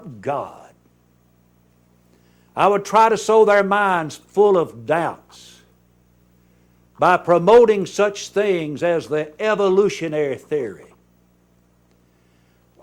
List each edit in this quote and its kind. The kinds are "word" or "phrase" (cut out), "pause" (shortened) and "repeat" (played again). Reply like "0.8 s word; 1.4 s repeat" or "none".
none

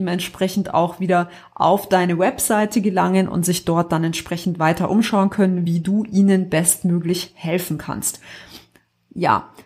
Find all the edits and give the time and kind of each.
none

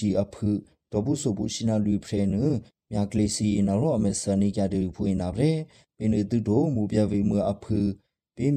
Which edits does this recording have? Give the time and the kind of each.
none

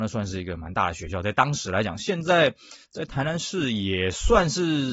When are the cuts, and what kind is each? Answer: 2.8 s pause

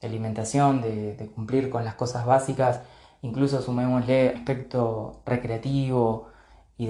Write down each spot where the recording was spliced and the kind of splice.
4.4 s word

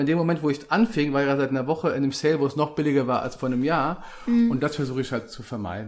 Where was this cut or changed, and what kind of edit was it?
none

